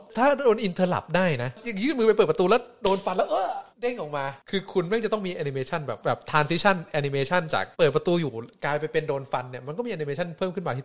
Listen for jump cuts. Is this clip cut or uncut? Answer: cut